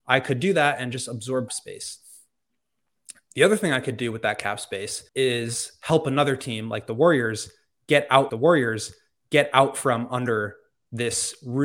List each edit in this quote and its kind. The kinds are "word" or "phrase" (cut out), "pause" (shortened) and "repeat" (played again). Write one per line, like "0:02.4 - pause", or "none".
0:01.5 - phrase
0:05.1 - pause
0:08.3 - repeat